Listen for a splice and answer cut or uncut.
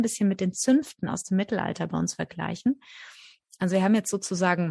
uncut